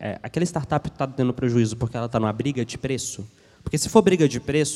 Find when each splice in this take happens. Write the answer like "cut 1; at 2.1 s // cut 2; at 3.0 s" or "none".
none